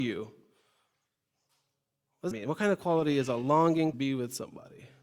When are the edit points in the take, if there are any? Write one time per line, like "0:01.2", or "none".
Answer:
0:02.3
0:03.9